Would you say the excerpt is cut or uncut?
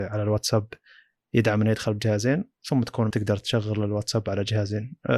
cut